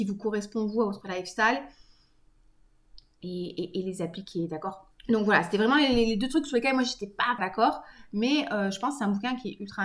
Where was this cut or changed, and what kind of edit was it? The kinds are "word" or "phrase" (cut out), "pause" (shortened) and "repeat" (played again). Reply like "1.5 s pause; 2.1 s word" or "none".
5.0 s pause; 7.4 s phrase